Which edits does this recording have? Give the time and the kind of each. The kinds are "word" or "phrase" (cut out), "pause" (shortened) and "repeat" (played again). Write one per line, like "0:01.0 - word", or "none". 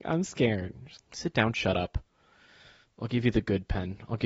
0:01.0 - word